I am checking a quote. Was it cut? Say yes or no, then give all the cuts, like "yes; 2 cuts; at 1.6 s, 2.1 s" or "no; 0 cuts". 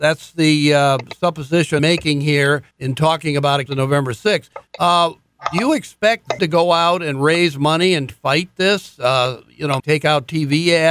yes; 7 cuts; at 1.8 s, 2.7 s, 3.7 s, 4.7 s, 6.4 s, 8.1 s, 9.8 s